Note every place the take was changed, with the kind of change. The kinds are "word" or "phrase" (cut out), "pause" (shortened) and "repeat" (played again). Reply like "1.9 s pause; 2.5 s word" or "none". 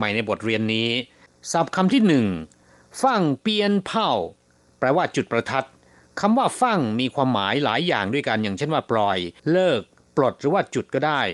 9.4 s pause